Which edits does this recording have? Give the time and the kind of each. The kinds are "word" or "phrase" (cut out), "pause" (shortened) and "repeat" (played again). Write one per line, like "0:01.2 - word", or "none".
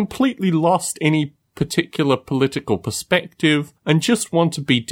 0:03.8 - pause